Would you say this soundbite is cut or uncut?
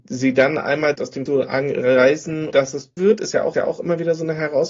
cut